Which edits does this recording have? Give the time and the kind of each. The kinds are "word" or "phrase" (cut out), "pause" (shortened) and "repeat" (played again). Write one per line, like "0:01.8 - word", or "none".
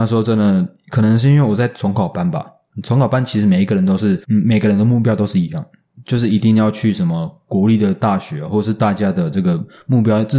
0:04.2 - pause

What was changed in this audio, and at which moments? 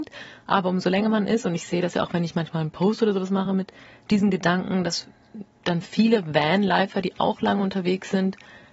none

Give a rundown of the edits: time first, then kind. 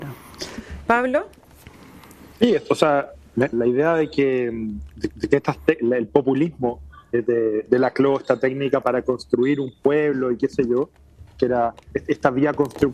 0:03.5 - word
0:05.1 - repeat

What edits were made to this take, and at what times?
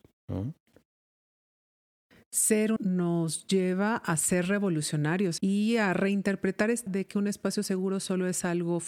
0:02.8 - phrase
0:05.4 - word
0:06.9 - word

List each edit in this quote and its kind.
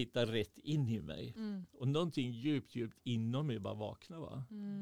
none

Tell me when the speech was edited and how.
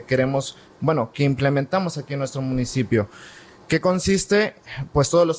none

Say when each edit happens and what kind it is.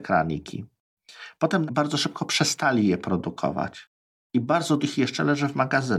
0:01.7 - word
0:04.8 - word

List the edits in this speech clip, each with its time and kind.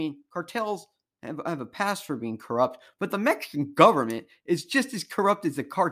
none

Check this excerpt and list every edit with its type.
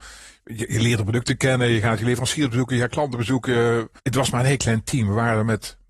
0:04.0 - pause

